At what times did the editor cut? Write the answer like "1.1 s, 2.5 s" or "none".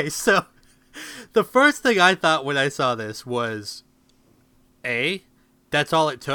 none